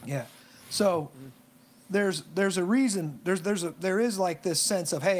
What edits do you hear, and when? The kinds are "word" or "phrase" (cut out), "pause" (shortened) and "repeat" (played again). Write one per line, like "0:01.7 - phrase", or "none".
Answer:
none